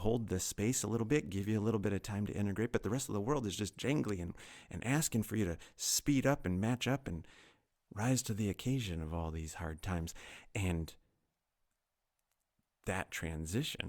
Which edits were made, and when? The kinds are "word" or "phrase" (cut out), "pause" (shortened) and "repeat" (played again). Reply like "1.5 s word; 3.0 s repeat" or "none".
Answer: none